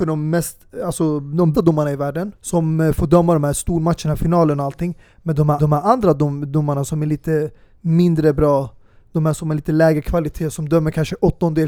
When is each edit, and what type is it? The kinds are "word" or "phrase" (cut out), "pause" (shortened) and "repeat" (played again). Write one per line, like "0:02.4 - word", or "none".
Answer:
0:01.5 - word
0:02.3 - pause
0:05.6 - repeat